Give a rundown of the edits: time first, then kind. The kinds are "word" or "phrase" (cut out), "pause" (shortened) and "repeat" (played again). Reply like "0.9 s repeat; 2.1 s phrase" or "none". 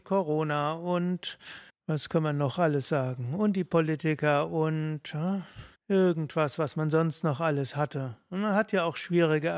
1.7 s pause; 5.8 s pause